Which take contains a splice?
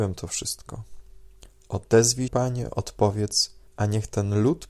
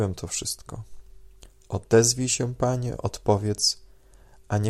first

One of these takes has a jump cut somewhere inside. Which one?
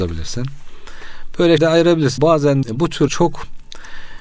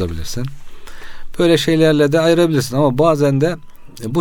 first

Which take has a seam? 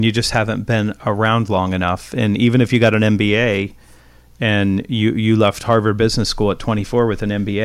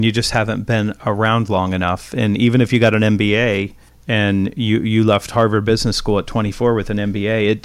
second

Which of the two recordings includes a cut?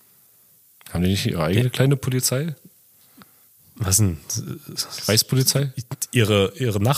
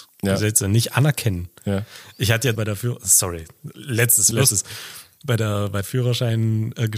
second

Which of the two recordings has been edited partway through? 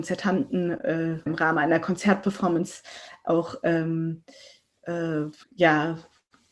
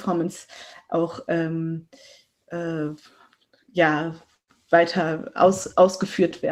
first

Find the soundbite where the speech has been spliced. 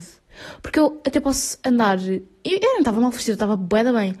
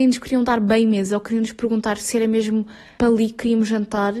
second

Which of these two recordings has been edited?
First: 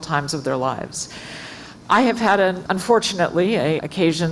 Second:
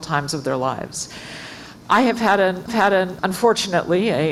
second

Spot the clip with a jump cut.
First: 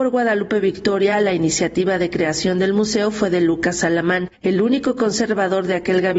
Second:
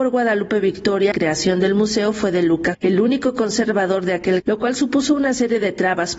second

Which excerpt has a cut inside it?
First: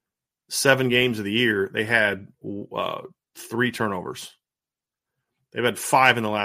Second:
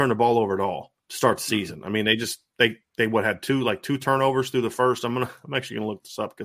second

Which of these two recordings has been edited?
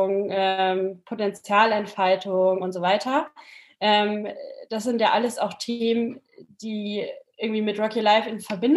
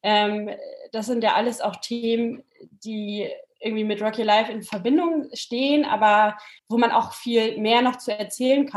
second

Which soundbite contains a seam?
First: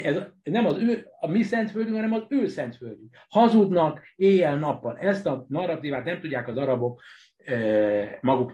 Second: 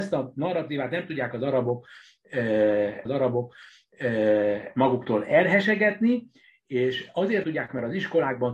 second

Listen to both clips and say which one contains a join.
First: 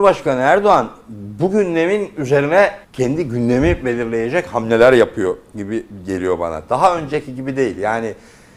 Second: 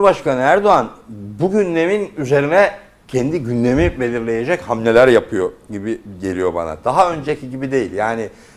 first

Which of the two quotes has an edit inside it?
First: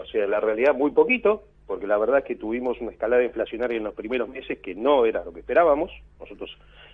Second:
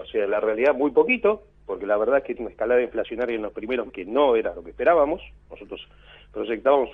second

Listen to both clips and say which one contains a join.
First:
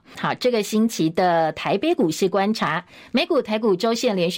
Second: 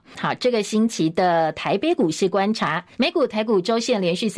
second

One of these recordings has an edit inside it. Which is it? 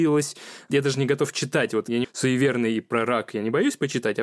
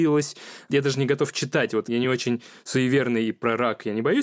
first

